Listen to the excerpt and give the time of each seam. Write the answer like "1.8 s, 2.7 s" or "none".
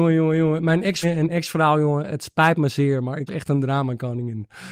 1.0 s, 3.3 s